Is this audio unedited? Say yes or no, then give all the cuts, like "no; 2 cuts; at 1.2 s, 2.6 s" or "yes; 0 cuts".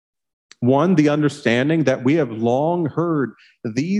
yes; 0 cuts